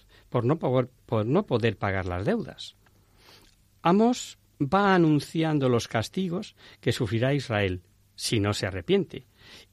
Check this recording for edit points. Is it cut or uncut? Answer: uncut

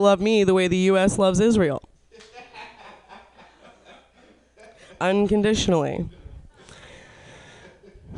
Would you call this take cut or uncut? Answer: uncut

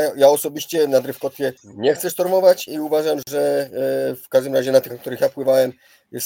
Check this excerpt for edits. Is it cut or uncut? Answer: cut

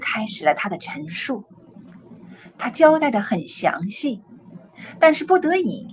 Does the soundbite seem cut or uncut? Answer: uncut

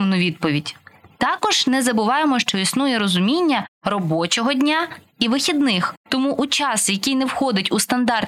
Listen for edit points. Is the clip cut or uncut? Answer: uncut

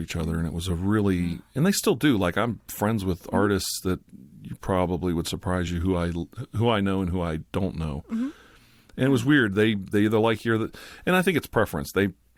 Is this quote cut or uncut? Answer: uncut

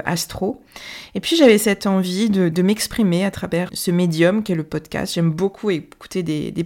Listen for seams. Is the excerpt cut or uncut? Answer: cut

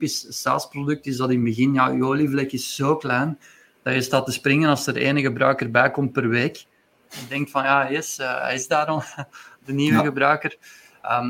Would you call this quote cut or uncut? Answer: uncut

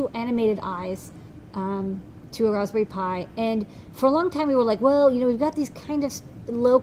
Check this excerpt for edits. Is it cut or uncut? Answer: uncut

